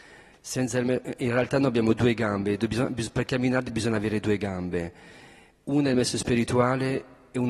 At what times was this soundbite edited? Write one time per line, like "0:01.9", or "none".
none